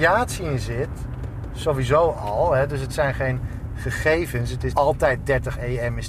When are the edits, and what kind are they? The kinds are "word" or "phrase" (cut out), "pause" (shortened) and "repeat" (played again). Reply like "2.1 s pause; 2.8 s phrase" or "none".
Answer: 4.7 s word